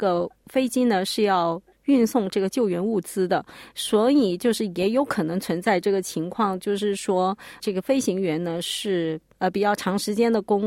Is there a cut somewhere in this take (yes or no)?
no